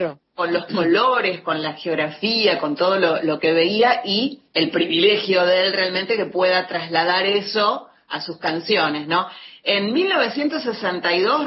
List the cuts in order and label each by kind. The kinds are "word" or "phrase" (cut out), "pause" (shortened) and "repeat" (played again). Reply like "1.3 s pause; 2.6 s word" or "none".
4.5 s pause